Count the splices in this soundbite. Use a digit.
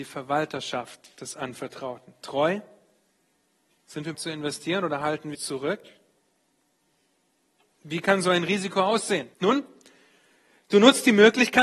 3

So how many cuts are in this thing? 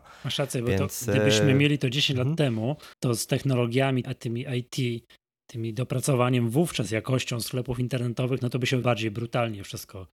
3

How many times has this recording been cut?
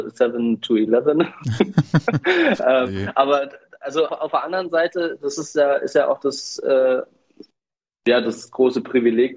1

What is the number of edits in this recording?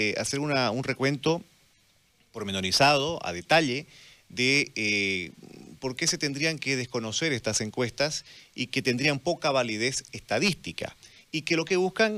0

